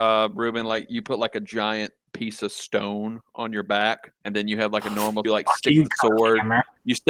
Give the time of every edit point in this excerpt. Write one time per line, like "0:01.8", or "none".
0:04.2
0:05.2